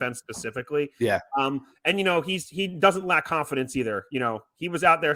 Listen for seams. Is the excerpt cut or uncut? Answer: uncut